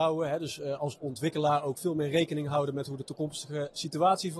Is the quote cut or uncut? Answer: uncut